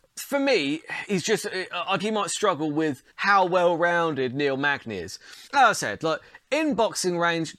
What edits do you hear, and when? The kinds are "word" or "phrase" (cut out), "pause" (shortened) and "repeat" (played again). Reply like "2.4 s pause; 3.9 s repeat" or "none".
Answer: 2.0 s phrase; 3.1 s pause; 5.5 s pause